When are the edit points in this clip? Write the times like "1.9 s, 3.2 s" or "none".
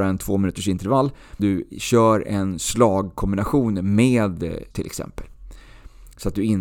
1.4 s, 1.7 s, 4.7 s